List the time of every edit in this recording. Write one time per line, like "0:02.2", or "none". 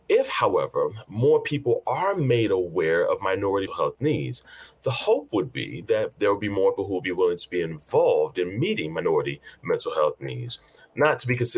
0:03.7
0:06.8